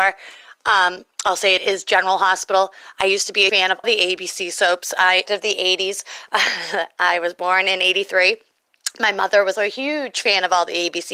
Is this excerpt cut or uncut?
cut